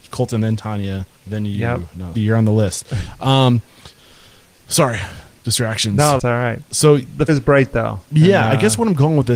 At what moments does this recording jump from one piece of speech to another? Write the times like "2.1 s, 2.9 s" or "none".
1.2 s, 2.1 s, 4.0 s, 6.2 s, 7.3 s